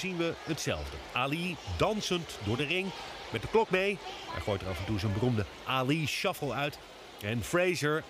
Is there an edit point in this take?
no; 0 cuts

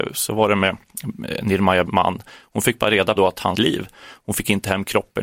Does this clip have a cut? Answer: yes; 3 cuts; at 1.9 s, 3.2 s, 3.5 s

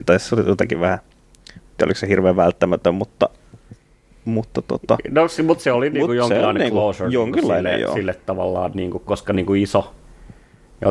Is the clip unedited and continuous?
yes; 0 cuts

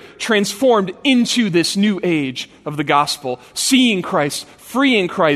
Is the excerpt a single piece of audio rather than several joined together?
yes; 0 cuts

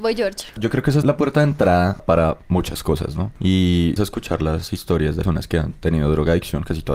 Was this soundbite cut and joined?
yes; 3 cuts; at 1.0 s, 4.0 s, 5.2 s

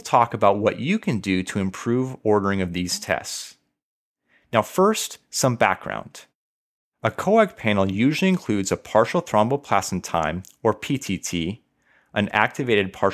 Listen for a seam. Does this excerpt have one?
no; 0 cuts

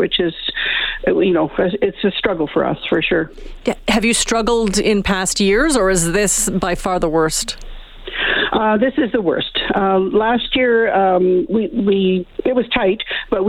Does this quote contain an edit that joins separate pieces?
yes; 1 cut; at 11.5 s

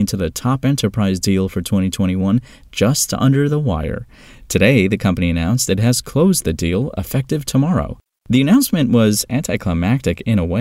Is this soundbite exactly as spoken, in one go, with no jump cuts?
yes; 0 cuts

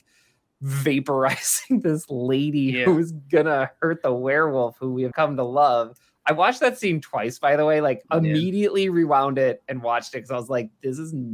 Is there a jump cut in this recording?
yes; 1 cut; at 5.1 s

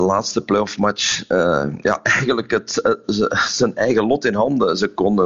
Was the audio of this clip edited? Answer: no; 0 cuts

